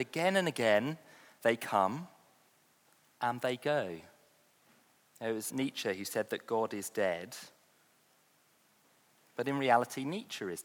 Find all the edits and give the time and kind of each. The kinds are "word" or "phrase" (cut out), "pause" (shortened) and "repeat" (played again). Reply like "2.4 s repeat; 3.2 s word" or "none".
5.5 s word